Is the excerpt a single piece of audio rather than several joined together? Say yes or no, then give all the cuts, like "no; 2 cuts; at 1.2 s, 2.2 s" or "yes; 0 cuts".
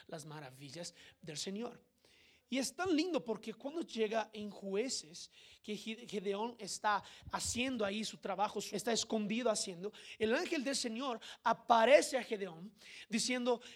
no; 1 cut; at 8.7 s